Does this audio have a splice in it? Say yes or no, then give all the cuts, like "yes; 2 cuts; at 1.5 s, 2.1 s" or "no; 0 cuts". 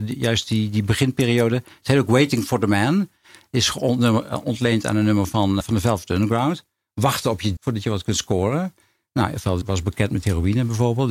yes; 3 cuts; at 5.6 s, 7.6 s, 9.6 s